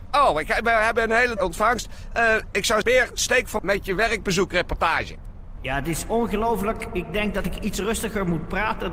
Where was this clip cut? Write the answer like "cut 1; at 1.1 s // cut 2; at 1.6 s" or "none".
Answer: cut 1; at 1.4 s // cut 2; at 2.8 s // cut 3; at 3.6 s